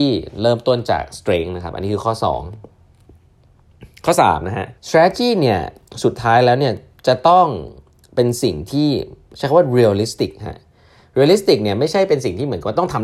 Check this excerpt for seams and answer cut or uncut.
cut